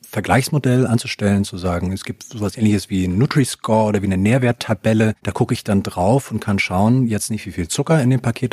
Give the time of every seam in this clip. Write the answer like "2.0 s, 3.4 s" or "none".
5.2 s